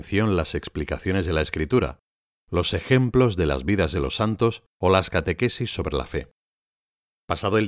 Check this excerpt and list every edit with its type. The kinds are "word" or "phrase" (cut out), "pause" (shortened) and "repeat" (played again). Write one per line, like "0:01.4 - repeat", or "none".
none